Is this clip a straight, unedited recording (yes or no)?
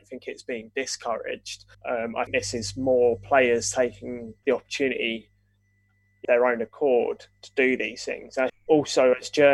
no